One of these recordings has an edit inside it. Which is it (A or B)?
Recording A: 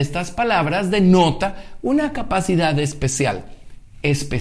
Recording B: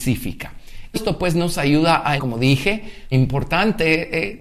B